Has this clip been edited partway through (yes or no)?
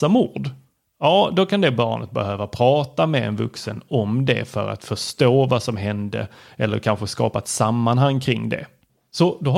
no